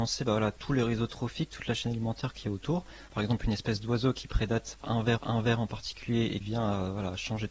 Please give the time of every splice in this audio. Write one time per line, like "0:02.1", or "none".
0:05.2
0:06.4